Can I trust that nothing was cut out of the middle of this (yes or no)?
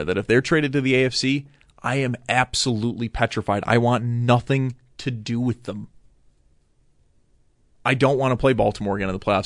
yes